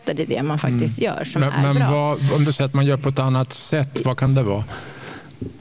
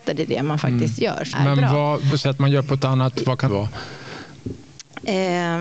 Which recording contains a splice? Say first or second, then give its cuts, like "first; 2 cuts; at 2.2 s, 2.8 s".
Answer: second; 4 cuts; at 1.3 s, 2.1 s, 3.1 s, 3.5 s